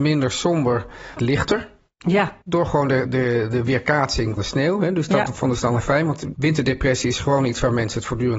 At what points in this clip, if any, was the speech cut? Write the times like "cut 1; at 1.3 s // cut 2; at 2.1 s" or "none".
cut 1; at 1.2 s // cut 2; at 2.4 s // cut 3; at 3.0 s // cut 4; at 4.4 s // cut 5; at 5.8 s // cut 6; at 6.3 s